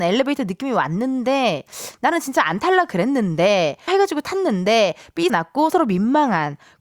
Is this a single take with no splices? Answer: no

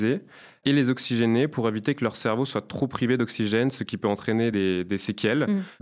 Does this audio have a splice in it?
no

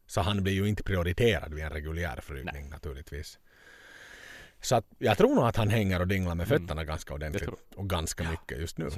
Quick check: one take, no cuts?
yes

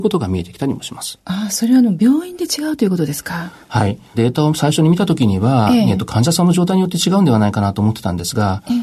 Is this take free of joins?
no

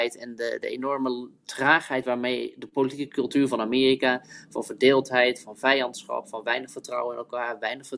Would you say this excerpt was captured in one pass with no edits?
no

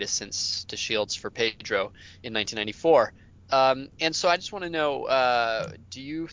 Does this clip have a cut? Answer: no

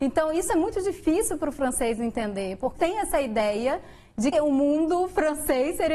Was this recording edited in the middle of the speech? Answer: yes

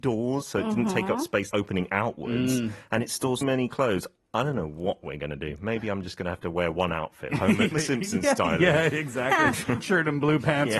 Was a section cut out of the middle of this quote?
yes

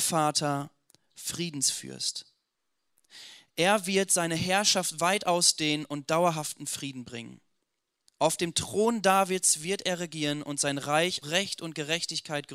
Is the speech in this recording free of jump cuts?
no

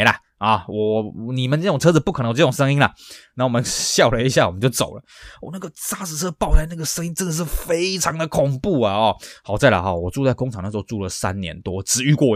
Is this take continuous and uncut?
yes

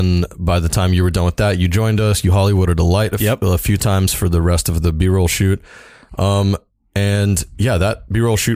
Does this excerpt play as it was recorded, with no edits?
yes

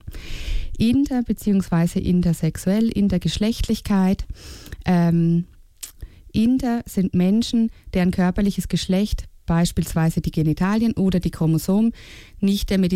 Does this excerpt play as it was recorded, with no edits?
yes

